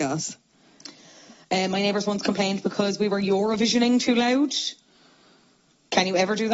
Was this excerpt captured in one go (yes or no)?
yes